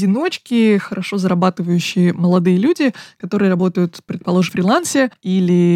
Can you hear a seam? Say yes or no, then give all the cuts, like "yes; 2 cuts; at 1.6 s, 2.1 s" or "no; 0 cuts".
yes; 1 cut; at 4.5 s